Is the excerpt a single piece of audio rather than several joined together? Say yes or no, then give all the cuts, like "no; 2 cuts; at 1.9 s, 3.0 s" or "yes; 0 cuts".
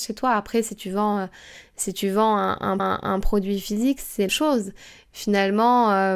no; 2 cuts; at 2.8 s, 4.3 s